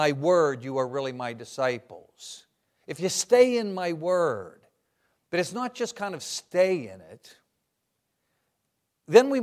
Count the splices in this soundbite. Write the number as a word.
zero